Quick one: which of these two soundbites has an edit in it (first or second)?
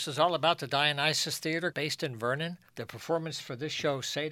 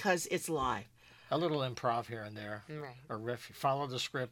first